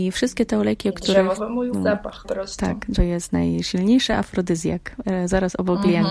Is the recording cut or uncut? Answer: cut